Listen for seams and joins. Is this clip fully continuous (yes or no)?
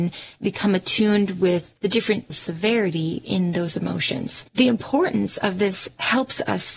no